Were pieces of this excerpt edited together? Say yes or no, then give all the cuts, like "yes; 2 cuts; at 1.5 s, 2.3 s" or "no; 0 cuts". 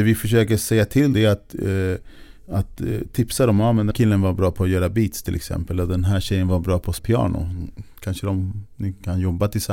yes; 3 cuts; at 1.1 s, 3.9 s, 7.0 s